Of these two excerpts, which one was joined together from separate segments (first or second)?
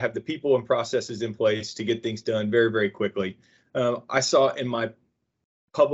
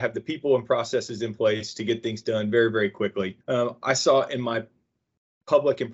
second